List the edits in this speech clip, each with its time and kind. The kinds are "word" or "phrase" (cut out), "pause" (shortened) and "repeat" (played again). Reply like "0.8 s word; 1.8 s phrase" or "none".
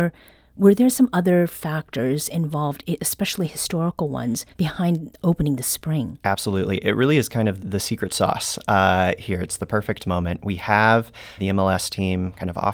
4.5 s pause; 7.6 s word; 11.4 s word